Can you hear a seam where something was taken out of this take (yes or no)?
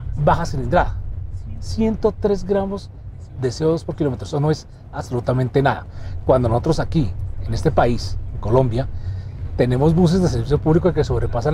no